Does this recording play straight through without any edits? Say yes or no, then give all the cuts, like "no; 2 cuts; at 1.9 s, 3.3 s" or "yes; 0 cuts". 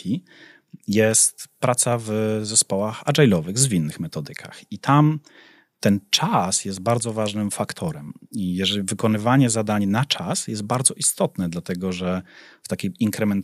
yes; 0 cuts